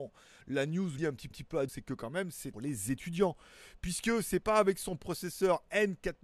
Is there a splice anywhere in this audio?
yes; 4 cuts; at 1.0 s, 1.3 s, 1.7 s, 2.5 s

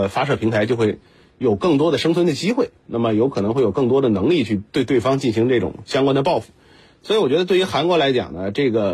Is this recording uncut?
yes; 0 cuts

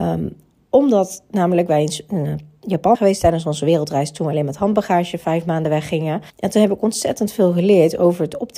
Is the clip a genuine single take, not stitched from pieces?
no; 2 cuts; at 2.9 s, 6.3 s

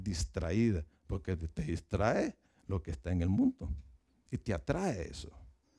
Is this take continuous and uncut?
yes; 0 cuts

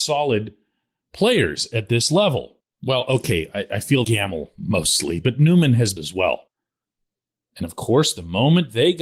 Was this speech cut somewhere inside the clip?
yes; 3 cuts; at 2.7 s, 4.0 s, 6.0 s

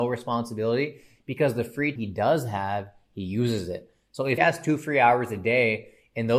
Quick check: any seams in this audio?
yes; 2 cuts; at 2.0 s, 4.4 s

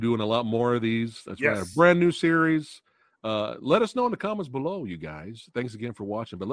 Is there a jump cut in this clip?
no; 0 cuts

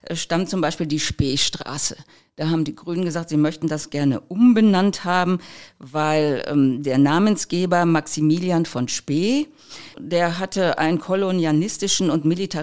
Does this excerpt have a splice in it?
yes; 1 cut; at 9.9 s

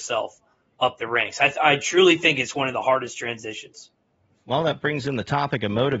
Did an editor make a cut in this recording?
no; 0 cuts

